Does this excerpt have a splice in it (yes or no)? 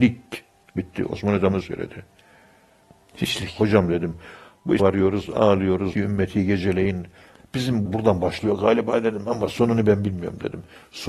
yes